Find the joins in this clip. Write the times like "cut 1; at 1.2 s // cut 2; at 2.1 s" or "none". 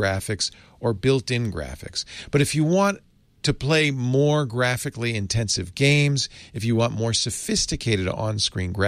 none